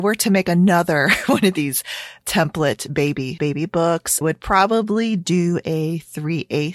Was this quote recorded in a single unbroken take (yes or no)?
no